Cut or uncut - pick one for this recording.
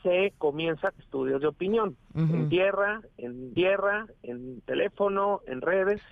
cut